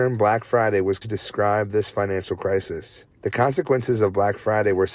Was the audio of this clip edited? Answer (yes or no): yes